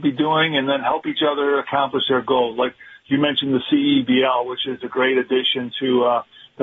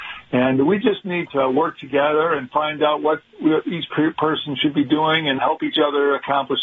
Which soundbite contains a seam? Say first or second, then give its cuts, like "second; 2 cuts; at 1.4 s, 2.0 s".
second; 2 cuts; at 1.3 s, 5.4 s